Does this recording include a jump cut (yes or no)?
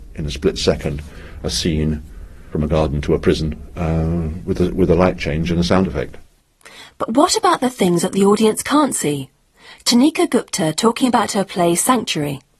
no